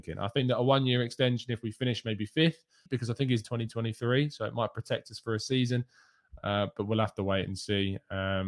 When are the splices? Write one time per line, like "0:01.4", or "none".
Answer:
0:02.9
0:03.4